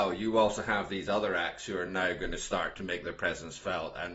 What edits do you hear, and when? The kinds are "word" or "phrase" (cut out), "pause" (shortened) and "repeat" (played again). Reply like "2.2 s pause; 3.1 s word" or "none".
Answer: none